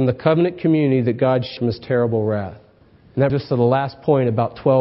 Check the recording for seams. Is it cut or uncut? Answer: cut